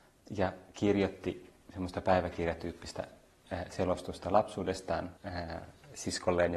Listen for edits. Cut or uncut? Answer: cut